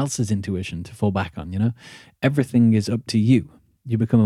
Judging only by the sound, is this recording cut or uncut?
uncut